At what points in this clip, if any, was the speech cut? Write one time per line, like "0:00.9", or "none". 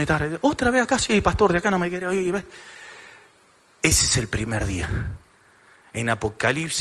none